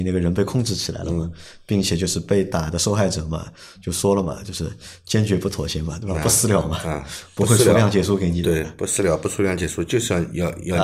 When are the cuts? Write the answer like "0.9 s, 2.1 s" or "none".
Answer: none